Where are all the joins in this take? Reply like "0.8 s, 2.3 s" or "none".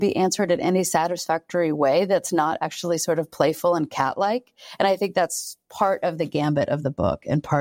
none